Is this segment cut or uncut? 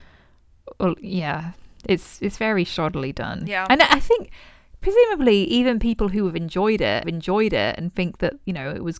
cut